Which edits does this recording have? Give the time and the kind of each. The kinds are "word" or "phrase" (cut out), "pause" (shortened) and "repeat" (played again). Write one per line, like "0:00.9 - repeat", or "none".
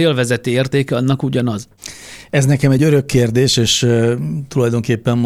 none